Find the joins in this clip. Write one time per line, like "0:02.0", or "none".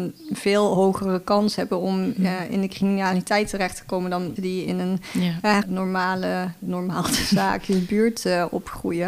0:04.4
0:05.6